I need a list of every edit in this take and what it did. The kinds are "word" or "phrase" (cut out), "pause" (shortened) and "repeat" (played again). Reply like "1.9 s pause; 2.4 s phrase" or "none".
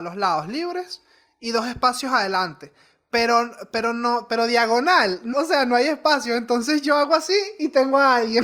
5.3 s word